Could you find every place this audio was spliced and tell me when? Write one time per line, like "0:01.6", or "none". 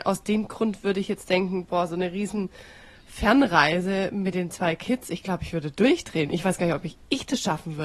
none